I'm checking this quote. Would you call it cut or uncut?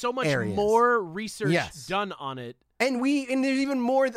uncut